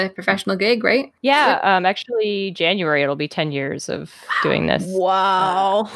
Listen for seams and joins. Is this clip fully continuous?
no; 1 cut; at 1.2 s

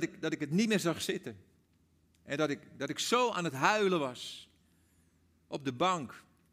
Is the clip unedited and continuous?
yes; 0 cuts

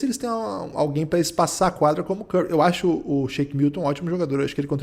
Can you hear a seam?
no; 0 cuts

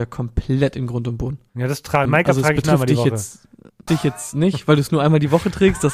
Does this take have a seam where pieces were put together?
yes; 3 cuts; at 1.5 s, 2.1 s, 3.9 s

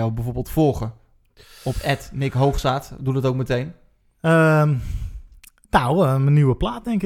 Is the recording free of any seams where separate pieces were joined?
yes; 0 cuts

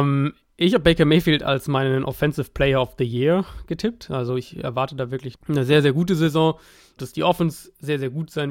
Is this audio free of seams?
no; 2 cuts; at 5.3 s, 7.0 s

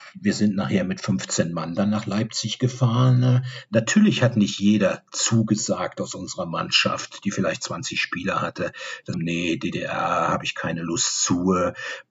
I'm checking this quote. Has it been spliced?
yes; 1 cut; at 9.1 s

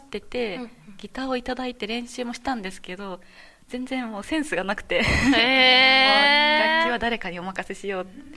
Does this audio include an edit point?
no; 0 cuts

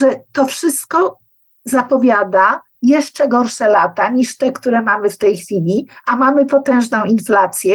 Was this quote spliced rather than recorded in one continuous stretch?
yes; 1 cut; at 2.7 s

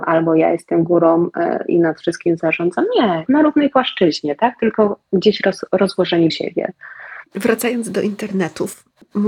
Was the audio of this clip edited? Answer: yes; 4 cuts; at 3.3 s, 5.0 s, 6.3 s, 7.3 s

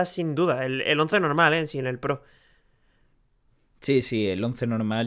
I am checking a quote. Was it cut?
no; 0 cuts

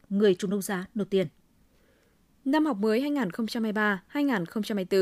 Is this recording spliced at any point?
no; 0 cuts

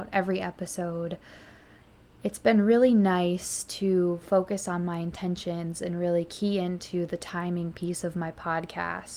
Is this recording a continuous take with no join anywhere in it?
yes; 0 cuts

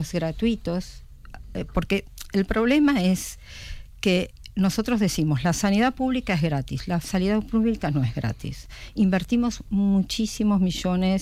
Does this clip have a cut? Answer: no; 0 cuts

